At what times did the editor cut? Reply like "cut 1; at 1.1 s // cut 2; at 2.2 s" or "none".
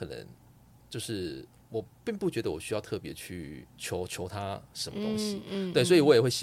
cut 1; at 1.9 s // cut 2; at 3.7 s